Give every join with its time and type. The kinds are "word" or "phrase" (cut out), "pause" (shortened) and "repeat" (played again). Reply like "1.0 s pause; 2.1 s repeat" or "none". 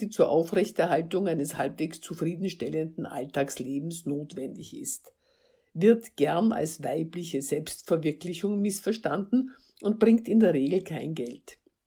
none